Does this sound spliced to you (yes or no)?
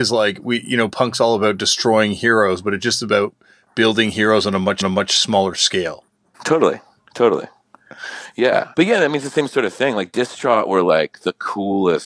yes